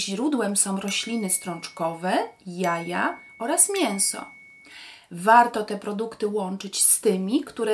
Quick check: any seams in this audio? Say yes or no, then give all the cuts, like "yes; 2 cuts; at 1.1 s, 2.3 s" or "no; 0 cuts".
no; 0 cuts